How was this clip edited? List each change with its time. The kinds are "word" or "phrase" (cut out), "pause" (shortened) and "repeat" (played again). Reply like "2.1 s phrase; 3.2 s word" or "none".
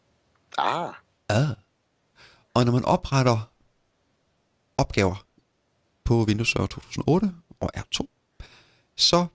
none